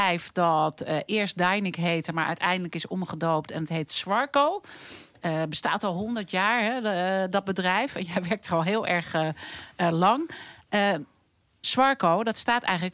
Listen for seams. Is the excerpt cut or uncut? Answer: uncut